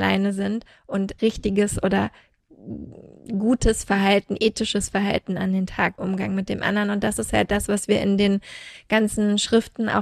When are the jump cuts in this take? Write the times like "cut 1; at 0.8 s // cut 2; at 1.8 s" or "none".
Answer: cut 1; at 1.2 s // cut 2; at 6.0 s